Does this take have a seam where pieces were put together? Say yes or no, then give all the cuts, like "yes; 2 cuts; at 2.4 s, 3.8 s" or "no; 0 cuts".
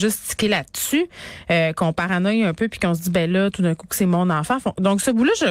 no; 0 cuts